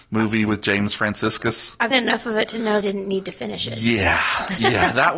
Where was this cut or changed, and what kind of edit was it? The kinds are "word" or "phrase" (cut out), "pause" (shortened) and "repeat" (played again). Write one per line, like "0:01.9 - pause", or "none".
0:01.9 - word
0:02.8 - phrase